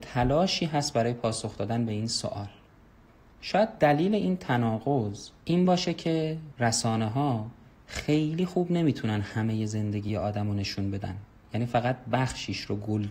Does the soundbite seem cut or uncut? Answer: uncut